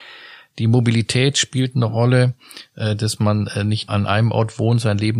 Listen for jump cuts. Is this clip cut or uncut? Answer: cut